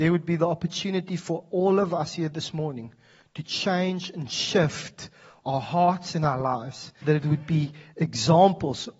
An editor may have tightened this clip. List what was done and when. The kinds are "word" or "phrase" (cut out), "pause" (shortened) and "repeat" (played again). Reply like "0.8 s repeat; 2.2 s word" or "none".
7.0 s word